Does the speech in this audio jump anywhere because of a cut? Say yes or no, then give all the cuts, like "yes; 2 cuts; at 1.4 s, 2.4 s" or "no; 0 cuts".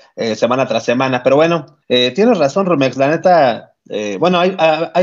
yes; 1 cut; at 1.8 s